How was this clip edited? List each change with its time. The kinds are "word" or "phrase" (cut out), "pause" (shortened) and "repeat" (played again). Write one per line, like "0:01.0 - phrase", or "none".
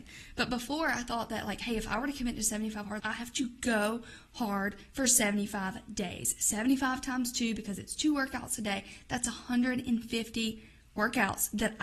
0:03.0 - word